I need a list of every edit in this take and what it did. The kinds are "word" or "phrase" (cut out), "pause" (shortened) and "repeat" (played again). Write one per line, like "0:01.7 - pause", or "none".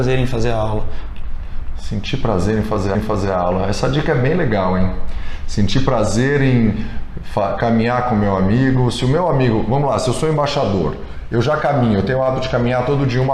0:02.9 - repeat